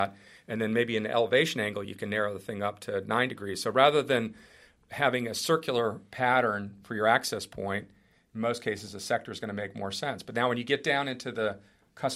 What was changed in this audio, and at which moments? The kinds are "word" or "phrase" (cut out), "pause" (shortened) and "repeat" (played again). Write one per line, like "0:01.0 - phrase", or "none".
none